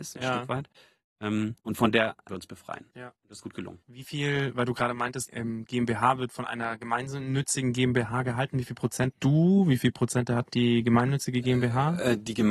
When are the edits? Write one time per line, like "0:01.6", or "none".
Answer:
0:01.6
0:02.3
0:03.4
0:03.8
0:05.3
0:09.1

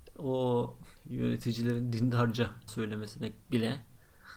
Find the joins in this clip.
0:01.0
0:02.7
0:03.4

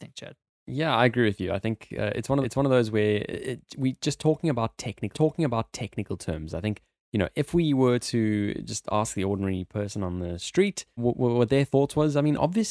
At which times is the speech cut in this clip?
0:02.4
0:05.1
0:11.0

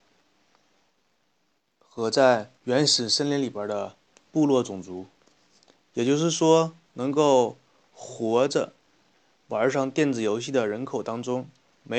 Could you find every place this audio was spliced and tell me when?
0:02.6

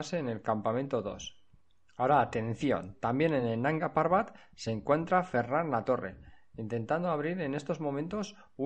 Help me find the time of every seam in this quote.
none

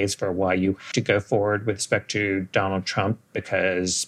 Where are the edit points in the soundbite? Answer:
0:00.9

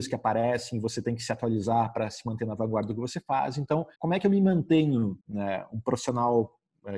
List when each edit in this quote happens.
0:03.9
0:05.2

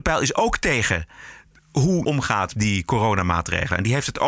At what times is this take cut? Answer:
0:02.0
0:02.5

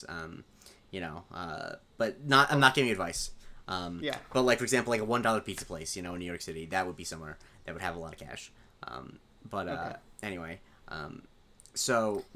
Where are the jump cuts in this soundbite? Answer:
none

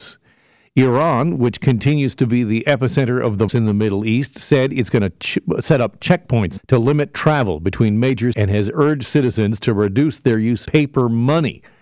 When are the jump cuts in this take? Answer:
0:03.5
0:06.6
0:08.3
0:10.7

